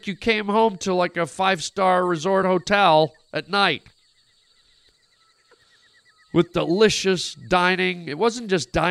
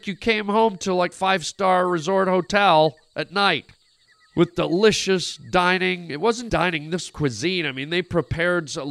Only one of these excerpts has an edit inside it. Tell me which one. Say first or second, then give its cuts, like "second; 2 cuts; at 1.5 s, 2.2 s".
second; 4 cuts; at 1.1 s, 4.1 s, 6.5 s, 7.1 s